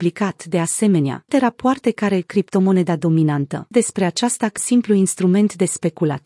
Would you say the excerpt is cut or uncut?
cut